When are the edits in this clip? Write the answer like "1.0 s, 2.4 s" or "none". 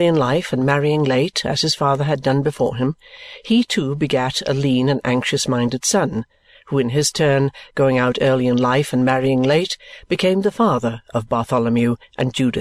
none